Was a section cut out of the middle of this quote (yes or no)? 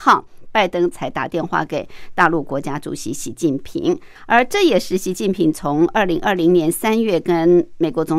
yes